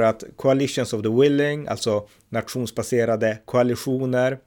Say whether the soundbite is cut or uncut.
uncut